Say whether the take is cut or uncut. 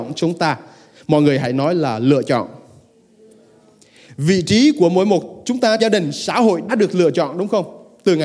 cut